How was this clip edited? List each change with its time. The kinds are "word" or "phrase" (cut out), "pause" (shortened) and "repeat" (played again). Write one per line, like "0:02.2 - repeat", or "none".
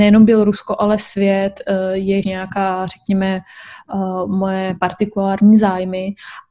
0:02.2 - phrase